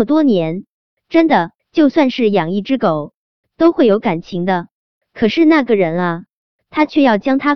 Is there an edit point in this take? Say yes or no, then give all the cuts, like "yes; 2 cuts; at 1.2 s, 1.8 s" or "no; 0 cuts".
yes; 1 cut; at 1.6 s